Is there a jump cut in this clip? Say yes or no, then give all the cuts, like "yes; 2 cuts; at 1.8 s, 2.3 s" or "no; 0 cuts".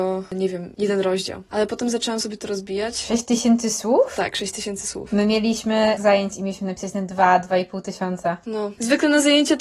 yes; 1 cut; at 6.0 s